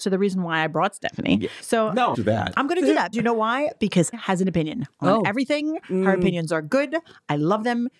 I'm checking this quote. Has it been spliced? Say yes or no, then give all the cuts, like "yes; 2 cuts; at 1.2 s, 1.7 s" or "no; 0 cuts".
yes; 4 cuts; at 1.6 s, 2.1 s, 3.1 s, 4.1 s